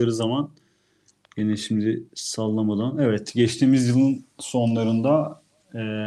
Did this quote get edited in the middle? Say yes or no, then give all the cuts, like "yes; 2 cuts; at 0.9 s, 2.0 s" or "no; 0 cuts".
no; 0 cuts